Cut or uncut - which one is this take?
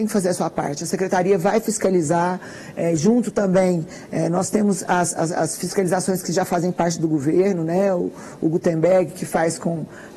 uncut